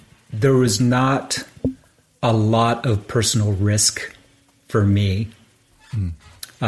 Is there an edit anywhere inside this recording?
no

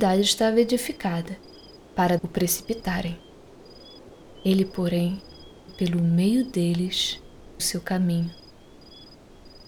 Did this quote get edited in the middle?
yes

